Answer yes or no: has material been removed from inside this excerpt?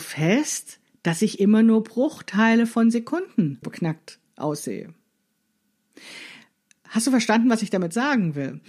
yes